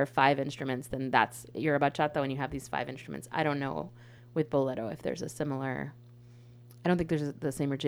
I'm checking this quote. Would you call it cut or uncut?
uncut